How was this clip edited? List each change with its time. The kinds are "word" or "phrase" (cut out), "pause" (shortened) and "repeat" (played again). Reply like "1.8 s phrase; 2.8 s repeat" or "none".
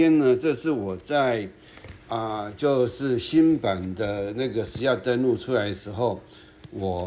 2.0 s pause